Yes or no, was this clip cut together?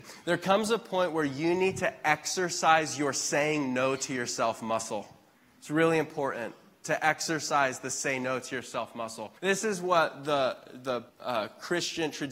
yes